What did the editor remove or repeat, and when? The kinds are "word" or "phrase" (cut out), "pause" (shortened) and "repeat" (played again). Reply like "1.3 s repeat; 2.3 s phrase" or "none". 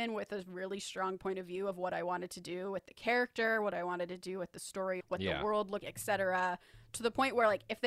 5.0 s word; 5.8 s word